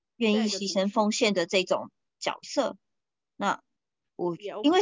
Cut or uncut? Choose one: uncut